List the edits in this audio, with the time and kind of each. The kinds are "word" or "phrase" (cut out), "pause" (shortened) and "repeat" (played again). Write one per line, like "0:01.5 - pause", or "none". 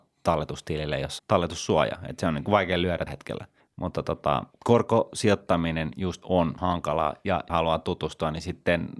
0:01.2 - word
0:02.5 - word
0:03.1 - word
0:03.6 - pause
0:04.5 - pause
0:06.2 - word
0:06.6 - word
0:07.5 - phrase